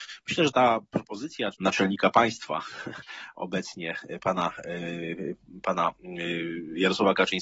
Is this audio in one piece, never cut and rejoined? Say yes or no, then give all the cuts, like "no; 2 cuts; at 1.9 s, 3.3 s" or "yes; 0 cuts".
no; 1 cut; at 1.5 s